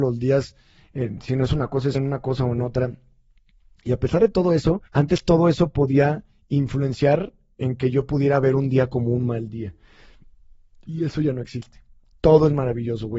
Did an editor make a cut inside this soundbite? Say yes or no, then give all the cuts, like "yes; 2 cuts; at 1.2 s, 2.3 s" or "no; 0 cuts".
yes; 2 cuts; at 1.9 s, 4.9 s